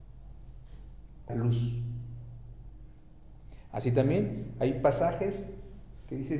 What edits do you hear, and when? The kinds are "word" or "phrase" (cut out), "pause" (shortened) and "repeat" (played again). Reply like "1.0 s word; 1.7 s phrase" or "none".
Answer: 1.3 s word